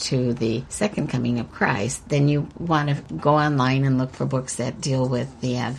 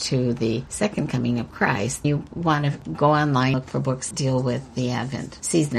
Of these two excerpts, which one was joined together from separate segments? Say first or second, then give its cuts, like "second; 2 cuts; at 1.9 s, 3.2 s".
second; 3 cuts; at 2.0 s, 3.5 s, 4.1 s